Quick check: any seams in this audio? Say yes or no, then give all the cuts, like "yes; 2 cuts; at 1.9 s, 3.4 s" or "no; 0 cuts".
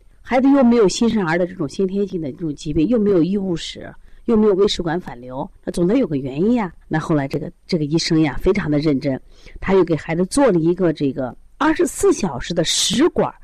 yes; 3 cuts; at 5.5 s, 6.8 s, 11.4 s